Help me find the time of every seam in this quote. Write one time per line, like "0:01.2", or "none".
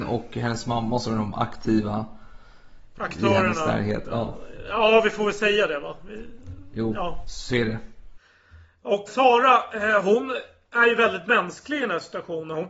0:09.1

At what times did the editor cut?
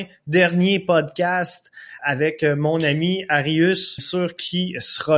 0:02.0
0:04.0

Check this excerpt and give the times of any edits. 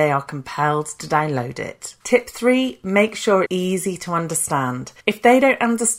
0:02.0
0:03.5
0:05.0

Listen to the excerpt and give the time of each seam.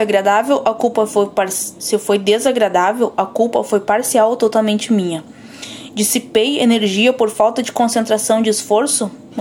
none

